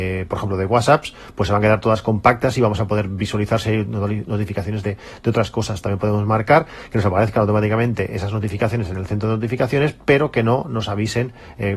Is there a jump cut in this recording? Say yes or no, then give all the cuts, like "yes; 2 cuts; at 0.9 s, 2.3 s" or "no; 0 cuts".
no; 0 cuts